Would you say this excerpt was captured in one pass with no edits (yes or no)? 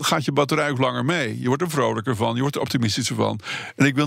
yes